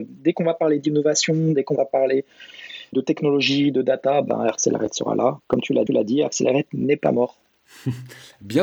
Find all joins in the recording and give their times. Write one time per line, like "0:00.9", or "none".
0:02.9
0:05.9